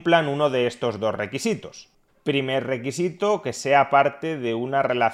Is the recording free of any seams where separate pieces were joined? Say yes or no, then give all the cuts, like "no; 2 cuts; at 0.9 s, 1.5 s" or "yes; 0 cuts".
yes; 0 cuts